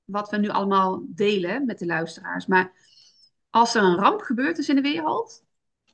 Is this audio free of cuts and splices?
yes; 0 cuts

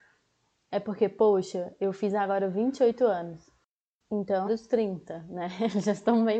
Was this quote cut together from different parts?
yes; 1 cut; at 4.5 s

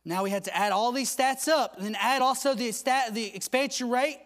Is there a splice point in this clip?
no; 0 cuts

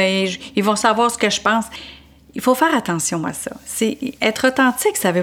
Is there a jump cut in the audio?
no; 0 cuts

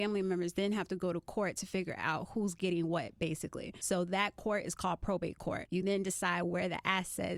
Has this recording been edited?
no; 0 cuts

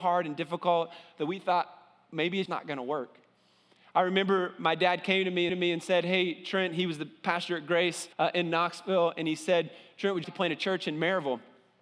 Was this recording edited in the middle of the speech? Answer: yes; 4 cuts; at 2.5 s, 5.5 s, 8.1 s, 10.2 s

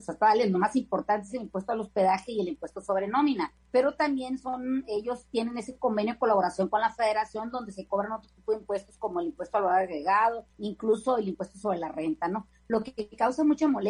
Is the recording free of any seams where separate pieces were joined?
no; 2 cuts; at 3.6 s, 10.5 s

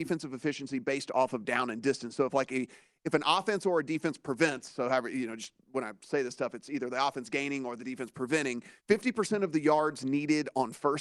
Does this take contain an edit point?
yes; 1 cut; at 8.8 s

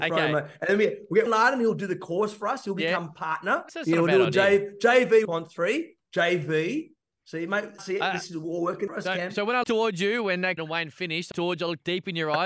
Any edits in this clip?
yes; 8 cuts; at 1.3 s, 3.7 s, 5.2 s, 7.8 s, 8.9 s, 9.6 s, 10.6 s, 11.3 s

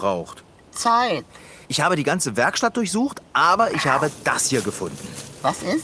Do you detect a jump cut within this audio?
yes; 1 cut; at 1.6 s

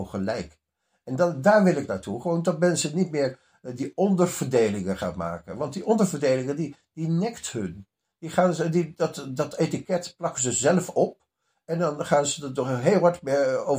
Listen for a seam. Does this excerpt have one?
no; 0 cuts

